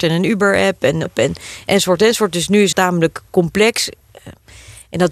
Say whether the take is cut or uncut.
cut